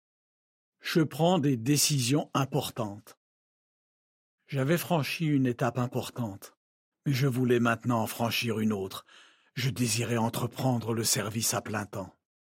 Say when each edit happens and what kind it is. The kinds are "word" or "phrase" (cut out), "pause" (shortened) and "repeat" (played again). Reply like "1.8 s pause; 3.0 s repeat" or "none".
4.0 s pause